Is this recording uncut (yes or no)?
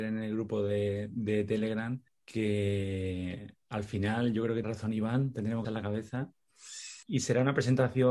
no